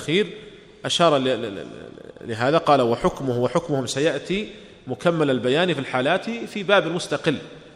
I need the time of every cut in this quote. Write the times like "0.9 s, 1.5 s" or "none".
none